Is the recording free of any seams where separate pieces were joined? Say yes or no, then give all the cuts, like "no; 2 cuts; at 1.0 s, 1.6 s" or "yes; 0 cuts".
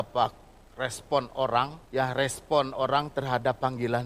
no; 1 cut; at 1.9 s